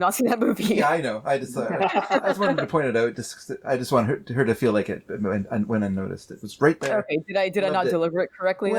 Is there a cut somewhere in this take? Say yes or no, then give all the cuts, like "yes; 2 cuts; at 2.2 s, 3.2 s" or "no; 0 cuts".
no; 0 cuts